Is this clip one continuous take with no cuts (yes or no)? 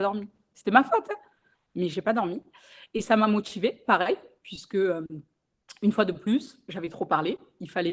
yes